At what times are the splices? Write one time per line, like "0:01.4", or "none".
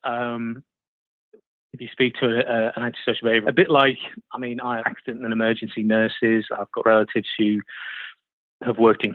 0:03.4
0:04.8